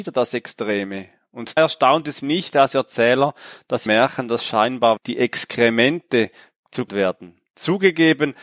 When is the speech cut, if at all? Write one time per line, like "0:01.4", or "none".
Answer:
0:01.6
0:02.2
0:03.9
0:05.0
0:06.9